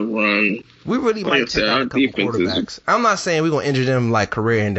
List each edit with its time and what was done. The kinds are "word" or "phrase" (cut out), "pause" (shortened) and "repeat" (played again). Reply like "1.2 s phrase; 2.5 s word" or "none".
none